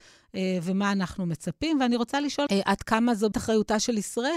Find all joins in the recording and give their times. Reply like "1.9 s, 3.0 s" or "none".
2.5 s, 3.3 s

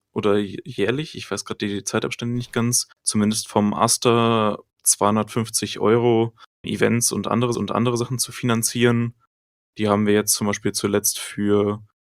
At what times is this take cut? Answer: 2.9 s, 6.6 s, 7.5 s

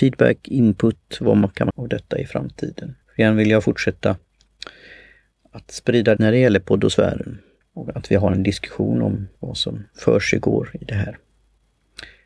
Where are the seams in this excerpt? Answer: 1.7 s, 3.0 s, 6.2 s, 7.6 s, 9.4 s

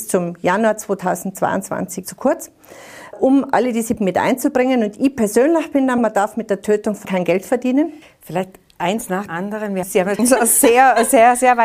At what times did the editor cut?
2.0 s, 3.1 s, 4.0 s, 6.0 s, 7.0 s, 9.3 s, 9.8 s, 10.2 s

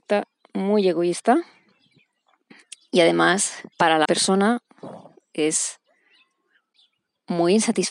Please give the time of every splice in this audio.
3.7 s, 4.0 s

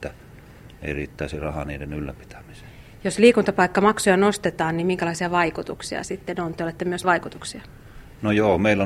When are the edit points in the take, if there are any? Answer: 6.0 s, 7.0 s

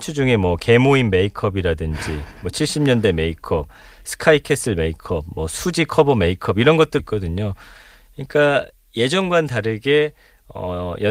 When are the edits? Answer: 7.0 s

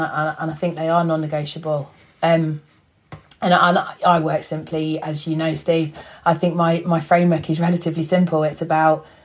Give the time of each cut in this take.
none

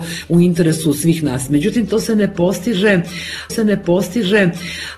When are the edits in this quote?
3.5 s

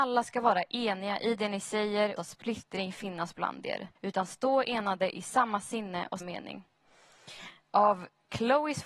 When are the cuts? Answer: 2.2 s, 4.0 s, 6.2 s

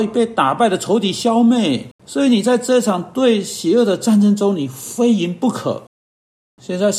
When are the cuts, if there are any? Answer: 1.9 s

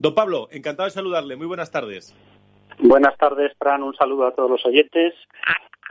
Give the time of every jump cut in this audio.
none

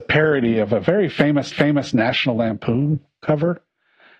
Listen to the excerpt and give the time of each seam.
1.5 s

